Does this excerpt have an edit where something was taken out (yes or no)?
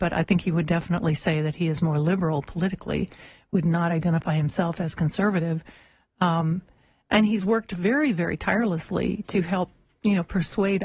no